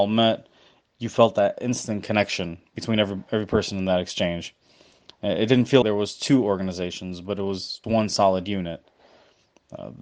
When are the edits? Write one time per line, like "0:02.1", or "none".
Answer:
0:05.8
0:07.8